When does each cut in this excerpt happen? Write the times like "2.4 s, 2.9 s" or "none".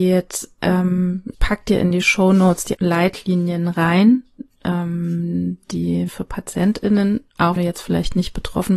1.3 s, 2.7 s, 6.1 s, 7.6 s